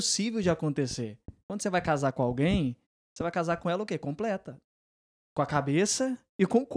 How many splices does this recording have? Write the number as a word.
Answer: zero